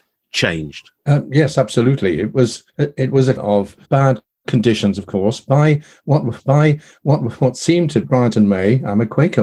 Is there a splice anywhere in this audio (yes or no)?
yes